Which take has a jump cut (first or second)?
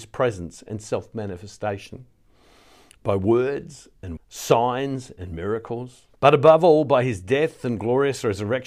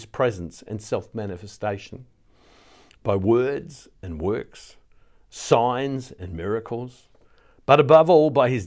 first